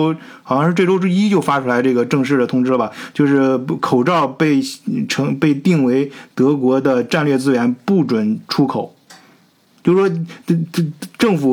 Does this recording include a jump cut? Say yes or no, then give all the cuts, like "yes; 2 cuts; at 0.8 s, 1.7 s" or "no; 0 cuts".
no; 0 cuts